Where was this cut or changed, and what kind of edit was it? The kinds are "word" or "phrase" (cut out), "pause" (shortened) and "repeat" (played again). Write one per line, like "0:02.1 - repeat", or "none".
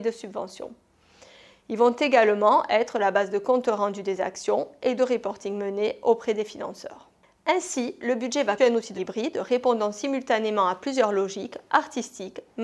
0:05.0 - word
0:08.6 - word
0:09.0 - word